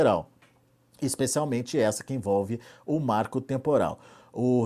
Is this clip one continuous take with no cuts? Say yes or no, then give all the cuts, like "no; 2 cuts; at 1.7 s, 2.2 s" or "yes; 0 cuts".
yes; 0 cuts